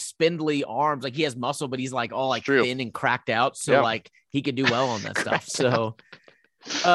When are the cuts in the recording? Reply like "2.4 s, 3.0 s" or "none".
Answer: none